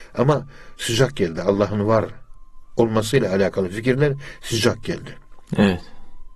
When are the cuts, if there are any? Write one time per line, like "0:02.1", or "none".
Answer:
none

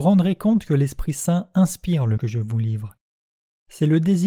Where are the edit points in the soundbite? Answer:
0:02.2

